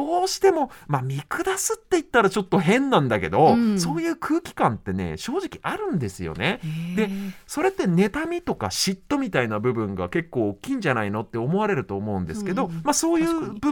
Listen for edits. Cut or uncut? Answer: uncut